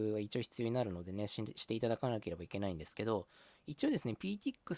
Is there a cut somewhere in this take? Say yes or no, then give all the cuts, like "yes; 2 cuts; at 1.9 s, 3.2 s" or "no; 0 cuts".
no; 0 cuts